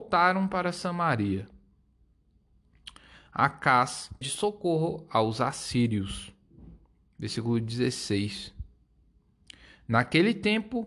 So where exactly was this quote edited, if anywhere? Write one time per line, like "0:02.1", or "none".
0:04.2